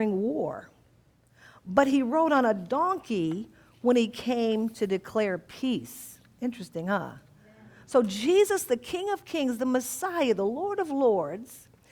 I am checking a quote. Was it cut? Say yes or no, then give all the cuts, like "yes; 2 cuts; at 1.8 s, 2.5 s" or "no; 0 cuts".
no; 0 cuts